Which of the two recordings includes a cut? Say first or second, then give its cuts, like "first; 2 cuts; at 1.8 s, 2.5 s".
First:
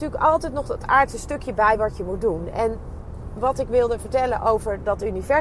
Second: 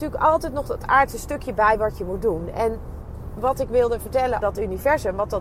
second; 1 cut; at 4.4 s